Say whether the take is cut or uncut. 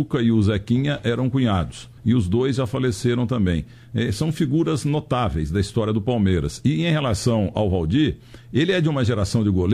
cut